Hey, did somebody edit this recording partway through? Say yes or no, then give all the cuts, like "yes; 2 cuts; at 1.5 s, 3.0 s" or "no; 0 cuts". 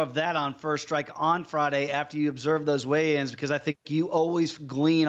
no; 0 cuts